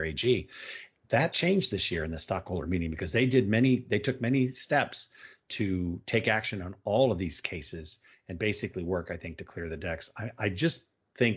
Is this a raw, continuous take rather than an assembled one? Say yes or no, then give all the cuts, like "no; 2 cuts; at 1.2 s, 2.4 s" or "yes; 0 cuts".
yes; 0 cuts